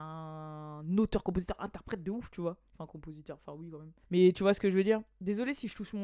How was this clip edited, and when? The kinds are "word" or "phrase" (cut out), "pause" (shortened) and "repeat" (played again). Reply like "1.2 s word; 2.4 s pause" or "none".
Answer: 2.7 s pause; 4.0 s pause